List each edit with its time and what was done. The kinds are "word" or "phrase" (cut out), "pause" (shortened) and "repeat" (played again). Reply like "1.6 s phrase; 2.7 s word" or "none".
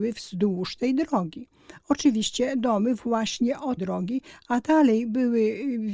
3.8 s word